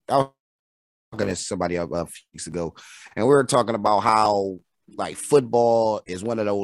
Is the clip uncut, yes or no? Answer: yes